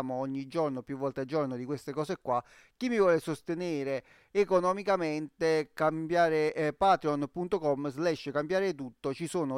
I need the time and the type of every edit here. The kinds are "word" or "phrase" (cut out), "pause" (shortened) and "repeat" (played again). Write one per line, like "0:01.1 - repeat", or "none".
none

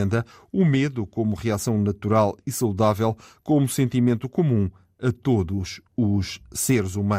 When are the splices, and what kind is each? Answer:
none

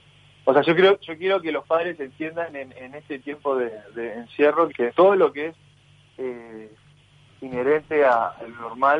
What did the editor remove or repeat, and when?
0:04.7 - word

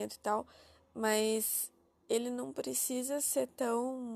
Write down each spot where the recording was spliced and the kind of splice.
none

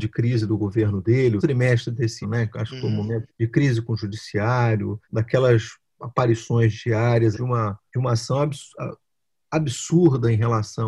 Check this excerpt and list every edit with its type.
0:01.4 - phrase
0:02.2 - word
0:03.3 - word
0:05.0 - pause
0:07.3 - word
0:07.9 - pause

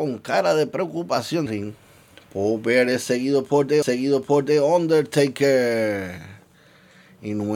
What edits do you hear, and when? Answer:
0:01.5 - phrase
0:03.8 - repeat

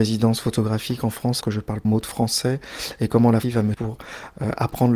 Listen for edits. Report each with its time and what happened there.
0:01.4 - word
0:01.8 - word
0:03.4 - word
0:03.7 - word

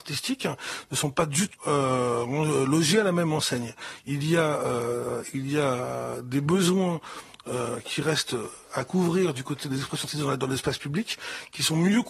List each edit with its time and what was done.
0:01.5 - word

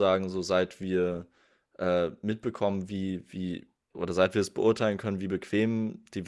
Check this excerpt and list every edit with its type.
none

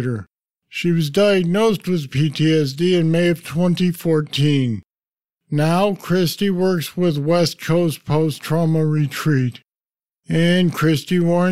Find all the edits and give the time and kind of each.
none

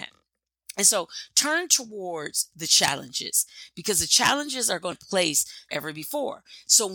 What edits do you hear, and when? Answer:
0:04.9 - phrase
0:05.7 - word

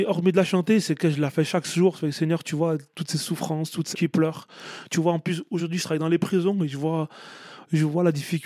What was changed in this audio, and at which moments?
0:03.9 - word

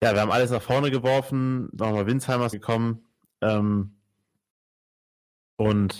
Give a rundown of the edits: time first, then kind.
0:01.8 - word
0:02.5 - word

